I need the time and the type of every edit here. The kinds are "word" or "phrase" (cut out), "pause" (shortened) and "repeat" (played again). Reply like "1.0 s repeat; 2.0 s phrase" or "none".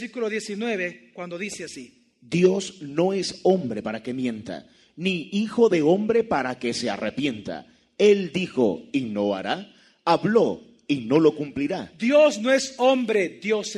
none